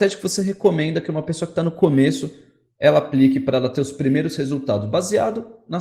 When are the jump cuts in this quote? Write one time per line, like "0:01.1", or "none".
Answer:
none

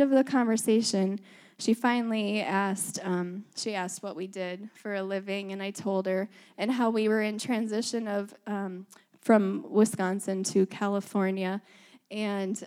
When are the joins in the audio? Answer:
none

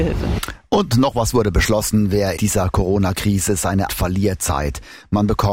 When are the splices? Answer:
0:02.4
0:03.9
0:04.4

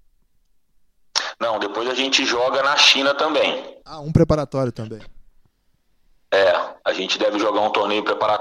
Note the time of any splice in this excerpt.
none

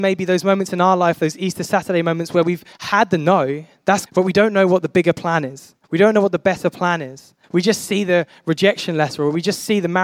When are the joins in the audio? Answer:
0:02.7
0:04.1
0:05.8
0:07.4

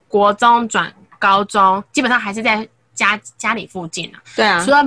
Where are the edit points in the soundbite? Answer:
none

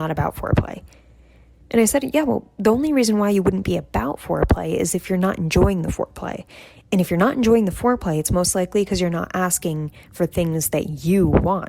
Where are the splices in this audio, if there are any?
none

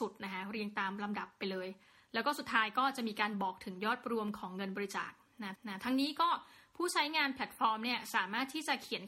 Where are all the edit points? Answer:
0:05.5

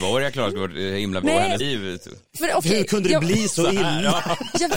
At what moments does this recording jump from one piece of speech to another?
0:01.2
0:01.6

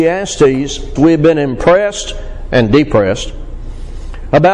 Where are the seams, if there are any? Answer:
0:01.0

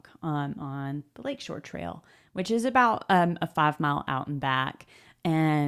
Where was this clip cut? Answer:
none

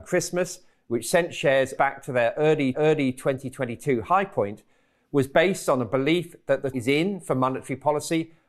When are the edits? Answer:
0:01.8
0:02.7
0:06.7

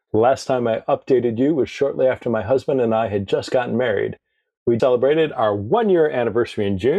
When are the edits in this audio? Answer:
0:04.8

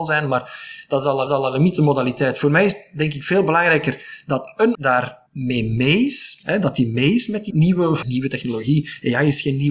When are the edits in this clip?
0:01.3
0:04.7
0:05.3
0:07.5
0:08.0

